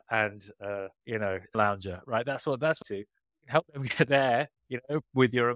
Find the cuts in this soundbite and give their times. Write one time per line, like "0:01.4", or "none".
0:01.0
0:01.5
0:02.8
0:04.6